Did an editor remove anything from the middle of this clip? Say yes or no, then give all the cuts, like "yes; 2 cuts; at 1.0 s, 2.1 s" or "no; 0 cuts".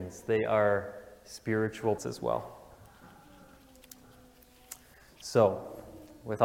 yes; 1 cut; at 2.0 s